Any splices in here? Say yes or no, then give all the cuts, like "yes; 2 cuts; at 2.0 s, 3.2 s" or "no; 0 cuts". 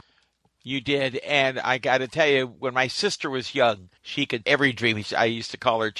yes; 2 cuts; at 4.0 s, 4.4 s